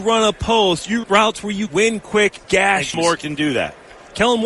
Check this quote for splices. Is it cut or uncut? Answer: cut